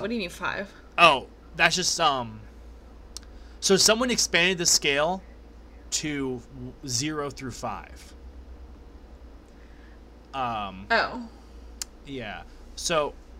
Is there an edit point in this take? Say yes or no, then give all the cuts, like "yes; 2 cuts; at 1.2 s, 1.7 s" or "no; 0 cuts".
yes; 1 cut; at 1.4 s